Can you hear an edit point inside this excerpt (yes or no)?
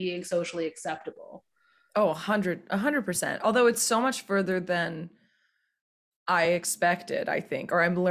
no